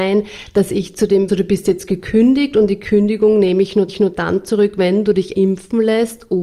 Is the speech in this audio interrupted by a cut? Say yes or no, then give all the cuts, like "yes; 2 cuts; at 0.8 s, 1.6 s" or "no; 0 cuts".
yes; 3 cuts; at 1.3 s, 3.9 s, 5.3 s